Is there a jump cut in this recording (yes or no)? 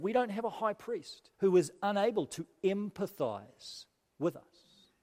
yes